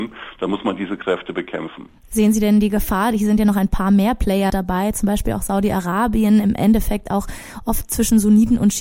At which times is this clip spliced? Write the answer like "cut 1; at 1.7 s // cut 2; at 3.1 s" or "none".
cut 1; at 4.5 s

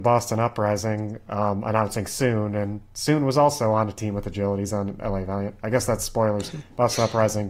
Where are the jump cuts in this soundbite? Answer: none

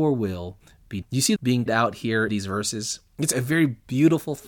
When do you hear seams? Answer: cut 1; at 1.0 s // cut 2; at 1.4 s // cut 3; at 1.7 s // cut 4; at 2.3 s // cut 5; at 3.3 s

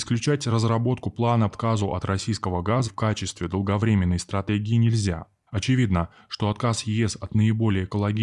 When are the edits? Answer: cut 1; at 1.5 s // cut 2; at 2.8 s // cut 3; at 5.5 s

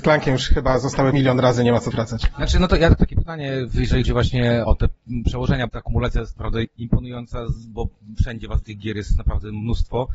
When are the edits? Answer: cut 1; at 1.1 s // cut 2; at 1.9 s // cut 3; at 3.0 s // cut 4; at 3.7 s // cut 5; at 4.0 s // cut 6; at 4.6 s // cut 7; at 5.7 s // cut 8; at 6.6 s // cut 9; at 8.6 s

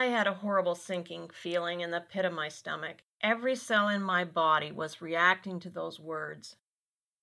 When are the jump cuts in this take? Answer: cut 1; at 3.1 s

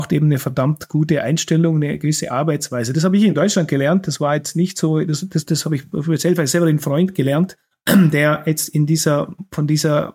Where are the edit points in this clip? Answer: cut 1; at 7.7 s

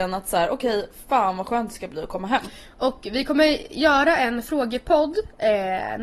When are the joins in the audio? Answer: none

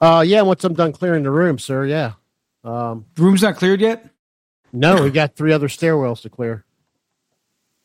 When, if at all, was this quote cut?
none

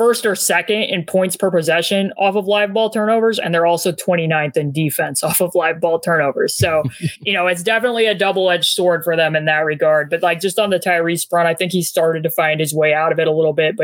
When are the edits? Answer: none

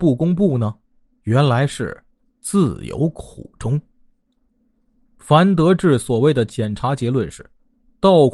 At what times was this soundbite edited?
none

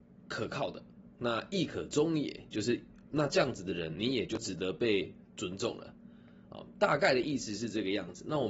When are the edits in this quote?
cut 1; at 1.1 s // cut 2; at 5.3 s

